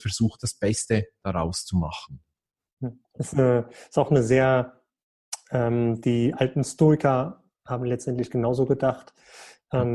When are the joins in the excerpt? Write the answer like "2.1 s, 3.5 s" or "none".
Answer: none